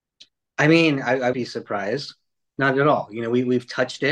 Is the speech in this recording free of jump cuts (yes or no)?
no